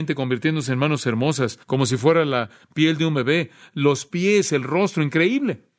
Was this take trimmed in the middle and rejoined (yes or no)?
yes